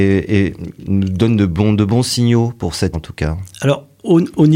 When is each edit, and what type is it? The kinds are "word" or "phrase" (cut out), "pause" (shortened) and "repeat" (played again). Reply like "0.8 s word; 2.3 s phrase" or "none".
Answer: 2.9 s word